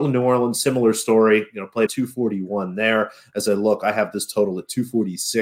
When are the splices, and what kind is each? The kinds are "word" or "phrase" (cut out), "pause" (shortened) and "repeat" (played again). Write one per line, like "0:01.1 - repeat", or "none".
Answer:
0:01.9 - word